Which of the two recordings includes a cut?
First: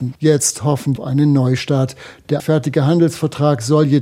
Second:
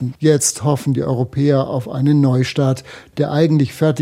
first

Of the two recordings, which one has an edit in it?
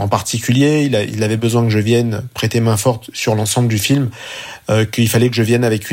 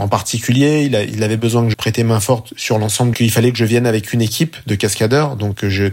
second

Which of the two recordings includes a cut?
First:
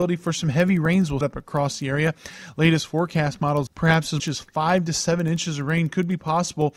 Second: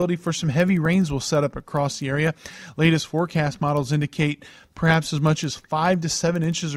first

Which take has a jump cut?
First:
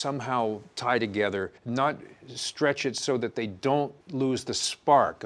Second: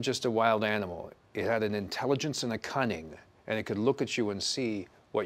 first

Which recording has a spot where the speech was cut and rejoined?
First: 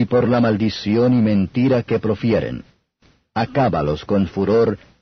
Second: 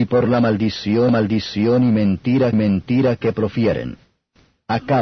second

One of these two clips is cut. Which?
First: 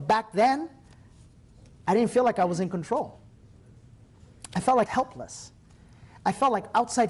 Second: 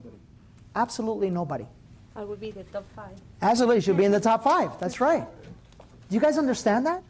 first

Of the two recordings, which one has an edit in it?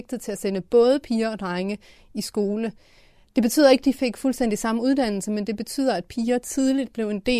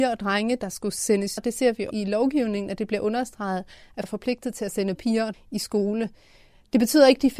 second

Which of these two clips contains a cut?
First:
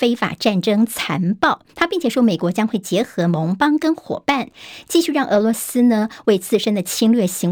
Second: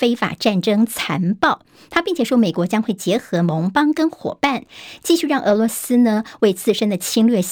first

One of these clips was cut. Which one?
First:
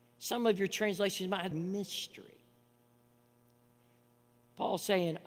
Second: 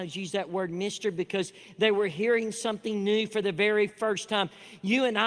first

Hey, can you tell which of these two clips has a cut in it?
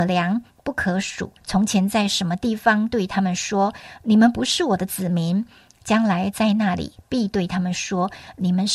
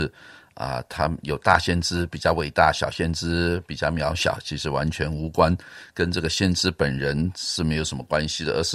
first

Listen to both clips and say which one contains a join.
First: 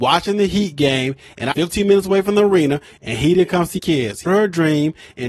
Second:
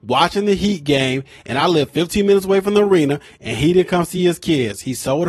first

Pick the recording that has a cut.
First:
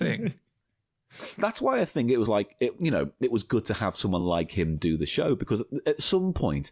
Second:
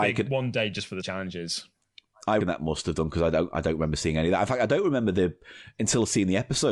second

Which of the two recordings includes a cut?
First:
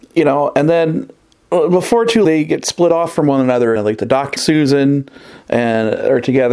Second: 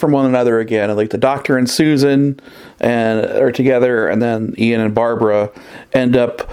first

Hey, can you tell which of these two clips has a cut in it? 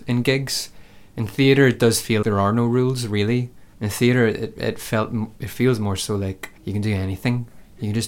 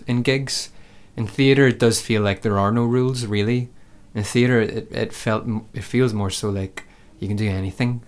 first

